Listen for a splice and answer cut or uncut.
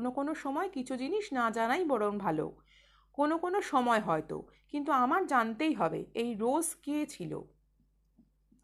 uncut